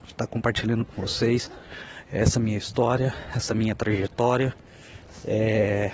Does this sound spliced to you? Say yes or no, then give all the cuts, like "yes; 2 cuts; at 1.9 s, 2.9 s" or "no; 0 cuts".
no; 0 cuts